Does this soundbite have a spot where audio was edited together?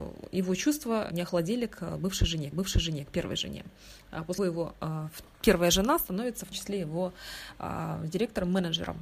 yes; 4 cuts; at 1.1 s, 2.5 s, 4.4 s, 6.5 s

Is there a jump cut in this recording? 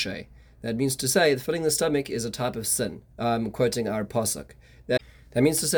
yes; 1 cut; at 3.1 s

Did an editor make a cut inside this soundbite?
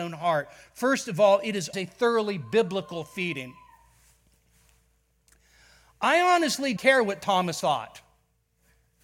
yes; 3 cuts; at 1.7 s, 6.8 s, 7.6 s

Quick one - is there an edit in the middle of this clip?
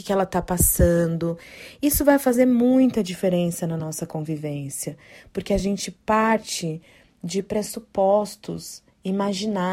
no; 0 cuts

